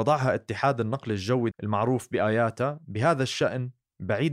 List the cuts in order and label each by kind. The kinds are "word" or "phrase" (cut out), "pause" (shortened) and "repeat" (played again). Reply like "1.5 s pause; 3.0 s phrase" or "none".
1.5 s word